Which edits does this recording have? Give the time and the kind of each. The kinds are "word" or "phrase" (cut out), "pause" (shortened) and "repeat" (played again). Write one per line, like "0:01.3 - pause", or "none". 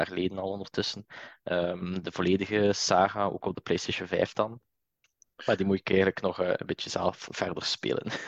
none

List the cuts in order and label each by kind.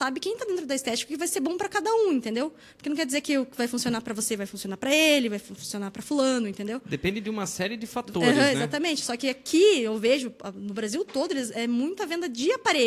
none

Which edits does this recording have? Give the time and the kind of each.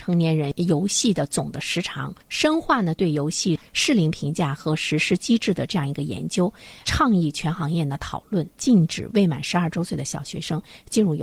0:02.2 - pause
0:08.5 - pause

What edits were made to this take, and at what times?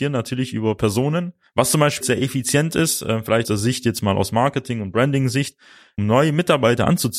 0:02.0 - word
0:03.4 - word
0:06.0 - word

